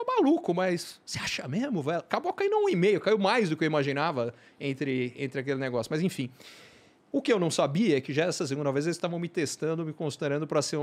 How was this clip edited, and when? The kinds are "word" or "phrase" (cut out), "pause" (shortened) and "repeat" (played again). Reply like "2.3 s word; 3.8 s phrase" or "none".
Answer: none